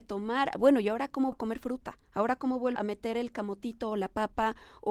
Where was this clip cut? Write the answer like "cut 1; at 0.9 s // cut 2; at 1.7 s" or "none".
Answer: cut 1; at 1.3 s // cut 2; at 2.0 s // cut 3; at 2.8 s